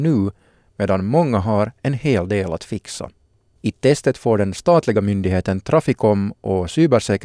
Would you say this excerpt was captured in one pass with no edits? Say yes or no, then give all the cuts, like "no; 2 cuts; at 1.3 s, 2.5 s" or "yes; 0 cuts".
yes; 0 cuts